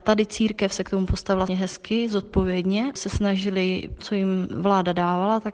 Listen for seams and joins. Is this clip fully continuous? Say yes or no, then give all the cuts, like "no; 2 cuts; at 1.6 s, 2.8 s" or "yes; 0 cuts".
no; 3 cuts; at 1.5 s, 3.0 s, 4.0 s